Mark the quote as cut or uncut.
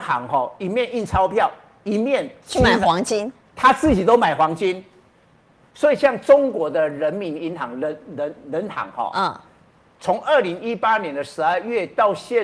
uncut